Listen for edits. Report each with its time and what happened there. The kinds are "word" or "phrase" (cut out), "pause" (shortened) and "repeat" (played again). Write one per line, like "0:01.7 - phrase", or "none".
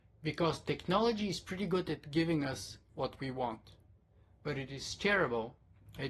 none